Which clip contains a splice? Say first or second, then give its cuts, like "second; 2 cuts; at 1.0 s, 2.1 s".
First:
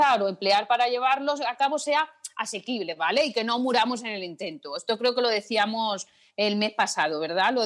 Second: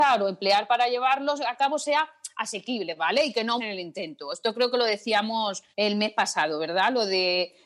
second; 2 cuts; at 3.6 s, 5.7 s